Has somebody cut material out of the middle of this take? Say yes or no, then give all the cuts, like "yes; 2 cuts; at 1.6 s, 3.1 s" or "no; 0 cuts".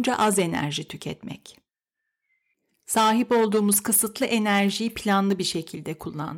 no; 0 cuts